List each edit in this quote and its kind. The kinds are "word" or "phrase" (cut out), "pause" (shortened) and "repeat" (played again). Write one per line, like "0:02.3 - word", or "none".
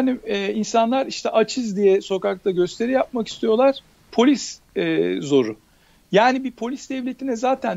none